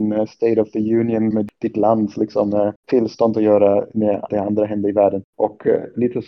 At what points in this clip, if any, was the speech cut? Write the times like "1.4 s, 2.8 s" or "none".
1.3 s, 2.8 s, 4.3 s